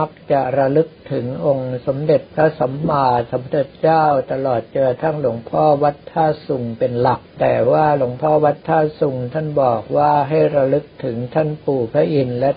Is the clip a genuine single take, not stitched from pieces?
no; 1 cut; at 7.3 s

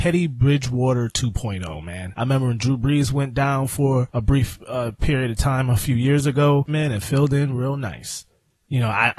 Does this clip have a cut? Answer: yes; 1 cut; at 6.7 s

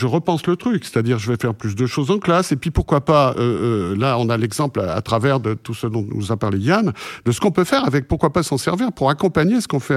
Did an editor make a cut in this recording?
no; 0 cuts

